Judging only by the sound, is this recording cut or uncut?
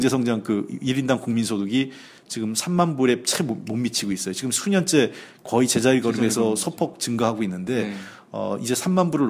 uncut